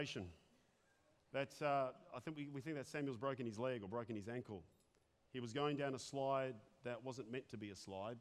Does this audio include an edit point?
no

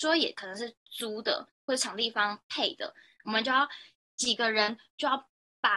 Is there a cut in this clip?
no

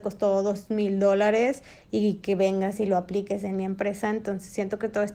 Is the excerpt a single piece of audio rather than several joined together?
yes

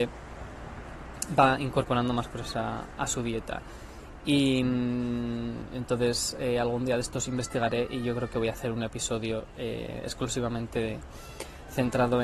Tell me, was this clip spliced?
no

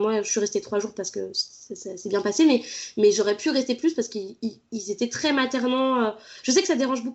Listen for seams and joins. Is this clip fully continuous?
yes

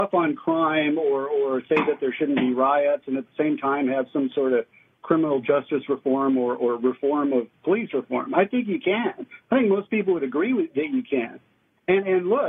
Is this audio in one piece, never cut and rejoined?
yes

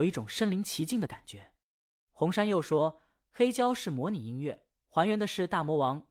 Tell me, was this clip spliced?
no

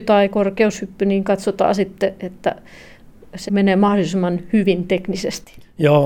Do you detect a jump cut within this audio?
yes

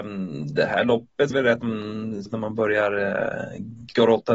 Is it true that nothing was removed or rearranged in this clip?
no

